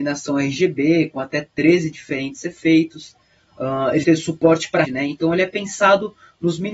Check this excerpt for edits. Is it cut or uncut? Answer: cut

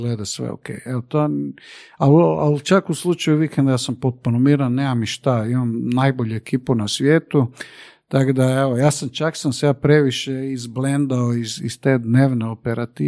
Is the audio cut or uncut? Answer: uncut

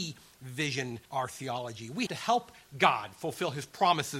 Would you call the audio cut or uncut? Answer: cut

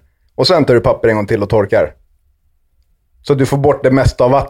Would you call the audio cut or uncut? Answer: uncut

